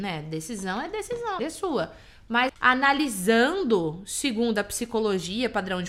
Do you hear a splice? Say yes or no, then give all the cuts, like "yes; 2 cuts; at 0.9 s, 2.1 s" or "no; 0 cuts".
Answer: yes; 2 cuts; at 1.4 s, 2.5 s